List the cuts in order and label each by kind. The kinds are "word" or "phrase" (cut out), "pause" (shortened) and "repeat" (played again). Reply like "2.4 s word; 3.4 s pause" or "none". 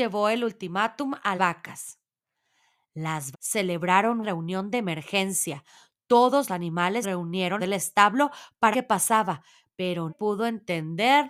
1.4 s word; 3.3 s word; 4.2 s word; 6.5 s word; 7.0 s word; 7.6 s word; 8.7 s word; 10.1 s word